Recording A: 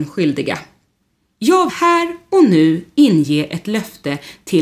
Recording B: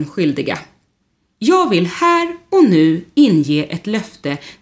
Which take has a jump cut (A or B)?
A